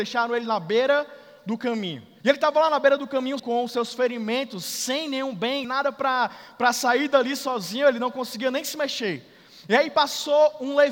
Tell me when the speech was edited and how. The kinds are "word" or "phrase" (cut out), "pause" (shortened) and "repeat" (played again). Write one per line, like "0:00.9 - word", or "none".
0:02.2 - pause
0:03.4 - word
0:05.6 - word